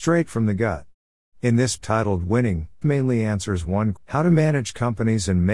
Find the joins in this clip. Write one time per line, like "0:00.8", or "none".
0:01.8
0:02.8
0:04.0